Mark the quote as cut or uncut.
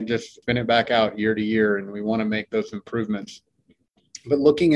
uncut